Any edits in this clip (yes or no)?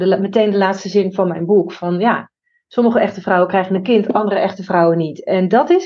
no